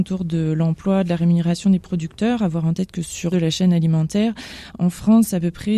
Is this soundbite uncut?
no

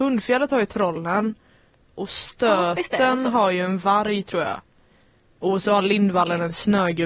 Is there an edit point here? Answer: no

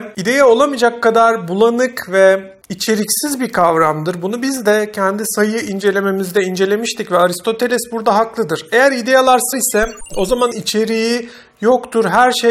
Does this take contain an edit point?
yes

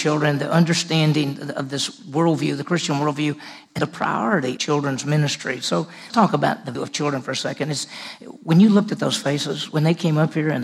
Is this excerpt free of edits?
no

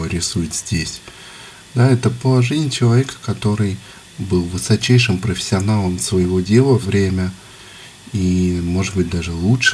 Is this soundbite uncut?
no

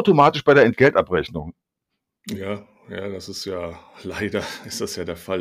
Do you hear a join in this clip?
no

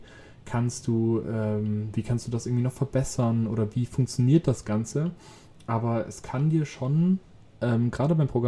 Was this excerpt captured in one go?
yes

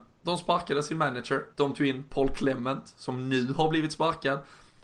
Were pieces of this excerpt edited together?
yes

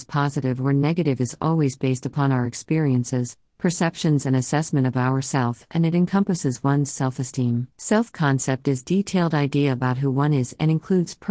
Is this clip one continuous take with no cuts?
no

